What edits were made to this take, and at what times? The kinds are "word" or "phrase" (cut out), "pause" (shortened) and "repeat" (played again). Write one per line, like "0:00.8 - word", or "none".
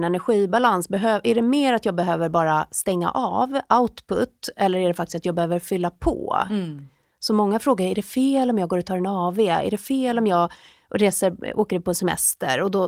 none